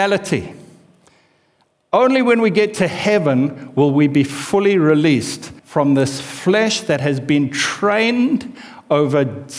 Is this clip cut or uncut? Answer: cut